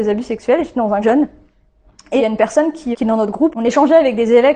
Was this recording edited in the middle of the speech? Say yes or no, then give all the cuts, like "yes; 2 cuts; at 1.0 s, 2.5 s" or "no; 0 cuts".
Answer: yes; 4 cuts; at 1.0 s, 2.2 s, 2.9 s, 3.5 s